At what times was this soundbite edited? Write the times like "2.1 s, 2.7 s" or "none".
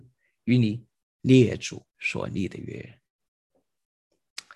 1.9 s

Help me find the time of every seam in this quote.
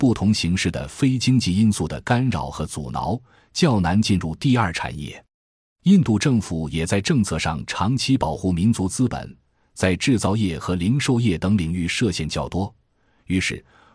none

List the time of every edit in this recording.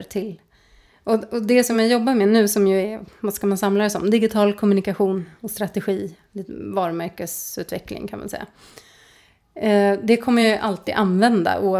none

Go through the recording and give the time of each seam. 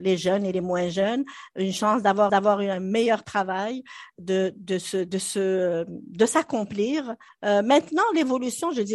2.3 s, 7.3 s

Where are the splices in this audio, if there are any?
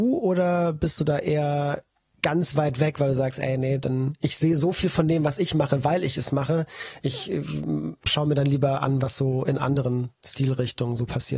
2.0 s

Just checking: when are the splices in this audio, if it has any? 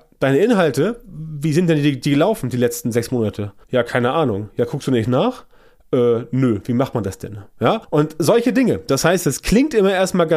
3.6 s, 7.8 s

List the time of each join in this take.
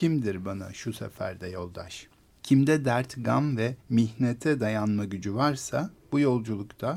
2.3 s, 3.8 s

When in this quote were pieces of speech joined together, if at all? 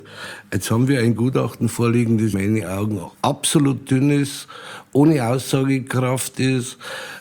2.3 s

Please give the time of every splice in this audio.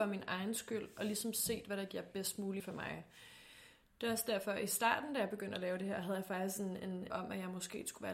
2.6 s, 7.1 s

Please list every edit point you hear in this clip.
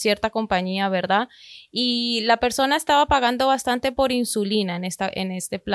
none

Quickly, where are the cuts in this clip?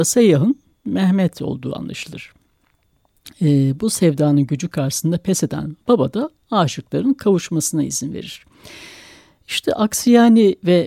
none

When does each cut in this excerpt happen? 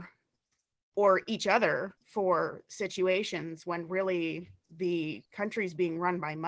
2.0 s, 5.3 s

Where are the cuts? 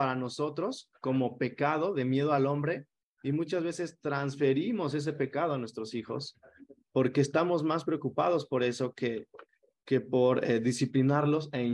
none

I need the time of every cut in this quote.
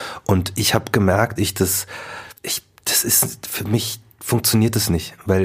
1.4 s, 2.4 s

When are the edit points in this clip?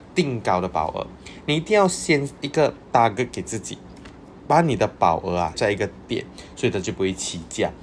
2.4 s, 5.5 s

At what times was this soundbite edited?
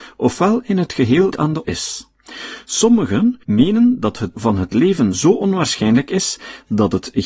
1.3 s, 1.6 s, 3.4 s, 4.3 s

